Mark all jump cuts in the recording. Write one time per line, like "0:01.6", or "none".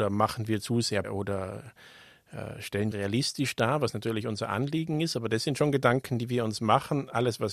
0:01.0
0:02.9